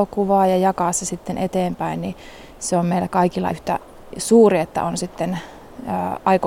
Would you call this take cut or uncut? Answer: cut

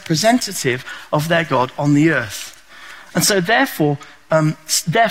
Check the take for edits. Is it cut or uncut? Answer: uncut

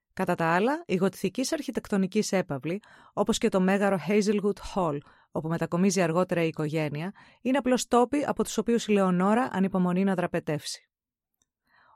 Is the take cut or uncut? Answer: uncut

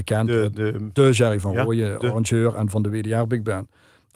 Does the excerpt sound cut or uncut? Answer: uncut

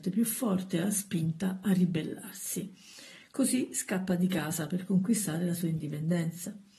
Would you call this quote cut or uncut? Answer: uncut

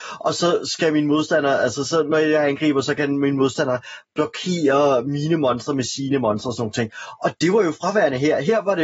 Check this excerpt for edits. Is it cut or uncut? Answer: uncut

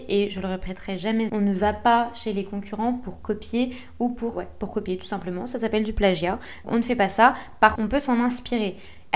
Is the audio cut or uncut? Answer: cut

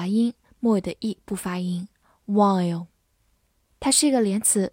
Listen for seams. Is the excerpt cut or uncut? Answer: uncut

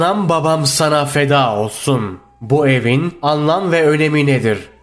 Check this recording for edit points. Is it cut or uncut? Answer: uncut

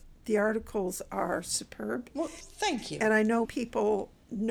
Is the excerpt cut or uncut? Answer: cut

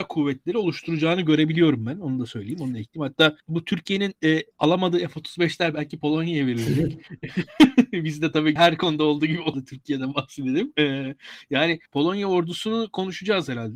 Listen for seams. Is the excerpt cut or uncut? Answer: cut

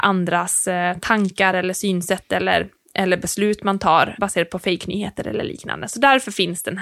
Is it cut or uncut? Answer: uncut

